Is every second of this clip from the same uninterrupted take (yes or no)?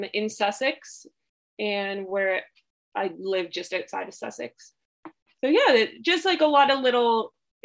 yes